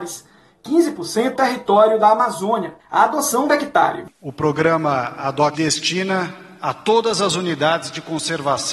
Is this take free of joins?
no; 5 cuts; at 1.3 s, 2.8 s, 3.5 s, 4.1 s, 5.5 s

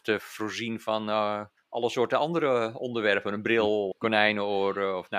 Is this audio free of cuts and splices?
no; 2 cuts; at 1.6 s, 3.9 s

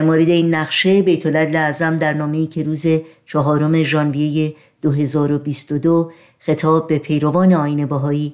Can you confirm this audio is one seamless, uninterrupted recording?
yes; 0 cuts

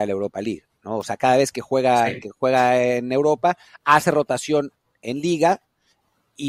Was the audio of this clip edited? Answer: no; 0 cuts

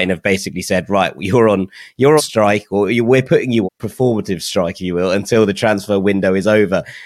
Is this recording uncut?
no; 2 cuts; at 2.2 s, 3.6 s

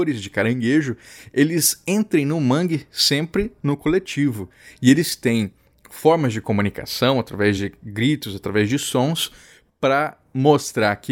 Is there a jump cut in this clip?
no; 0 cuts

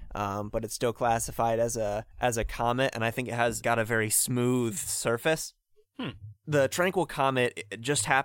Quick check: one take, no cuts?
no; 2 cuts; at 2.1 s, 3.6 s

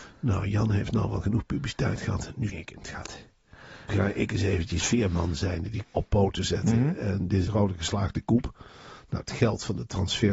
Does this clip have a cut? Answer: yes; 5 cuts; at 2.5 s, 3.9 s, 4.8 s, 5.8 s, 7.5 s

